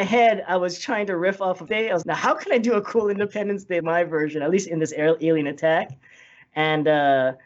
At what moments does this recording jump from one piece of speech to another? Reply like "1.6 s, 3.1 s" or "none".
1.7 s, 2.0 s, 3.8 s